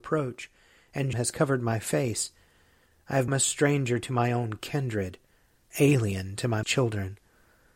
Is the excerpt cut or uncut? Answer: cut